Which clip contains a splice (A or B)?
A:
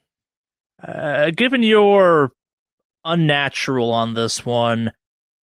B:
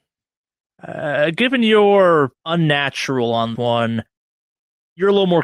B